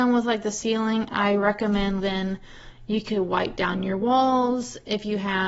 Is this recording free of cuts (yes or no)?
no